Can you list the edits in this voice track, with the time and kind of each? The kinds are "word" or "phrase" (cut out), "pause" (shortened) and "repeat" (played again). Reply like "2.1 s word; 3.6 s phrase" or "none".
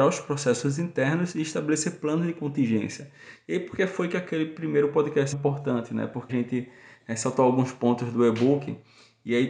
5.3 s phrase; 6.3 s word